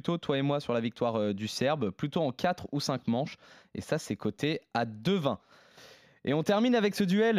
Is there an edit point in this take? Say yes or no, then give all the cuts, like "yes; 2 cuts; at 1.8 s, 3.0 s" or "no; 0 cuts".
no; 0 cuts